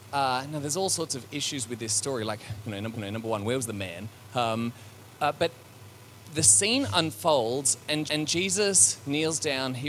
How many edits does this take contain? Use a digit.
2